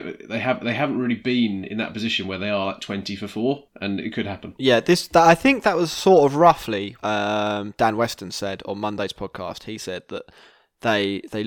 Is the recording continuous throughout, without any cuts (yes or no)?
no